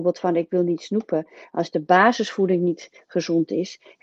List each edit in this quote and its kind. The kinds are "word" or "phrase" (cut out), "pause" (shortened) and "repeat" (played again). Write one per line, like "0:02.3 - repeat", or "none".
none